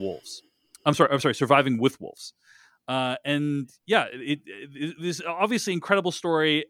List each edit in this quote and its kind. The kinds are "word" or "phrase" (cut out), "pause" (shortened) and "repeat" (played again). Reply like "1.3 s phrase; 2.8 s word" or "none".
none